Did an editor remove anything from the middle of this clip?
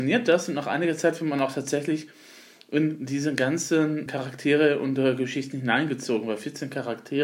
yes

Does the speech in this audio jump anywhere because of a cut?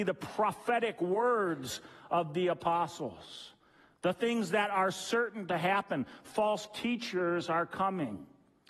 no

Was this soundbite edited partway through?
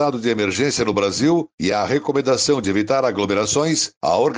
no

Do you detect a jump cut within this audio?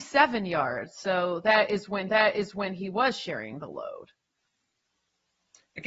yes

